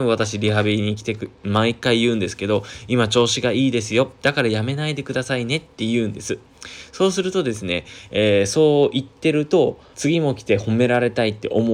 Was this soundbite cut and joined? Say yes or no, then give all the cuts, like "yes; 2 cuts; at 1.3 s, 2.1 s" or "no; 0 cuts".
yes; 1 cut; at 9.9 s